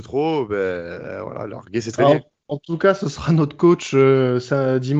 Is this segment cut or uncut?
cut